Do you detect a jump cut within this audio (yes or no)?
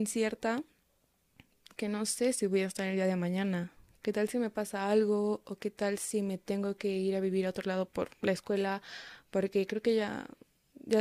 no